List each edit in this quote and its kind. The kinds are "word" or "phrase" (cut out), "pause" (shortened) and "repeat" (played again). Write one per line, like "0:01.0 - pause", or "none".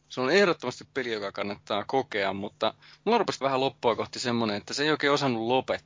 0:03.4 - word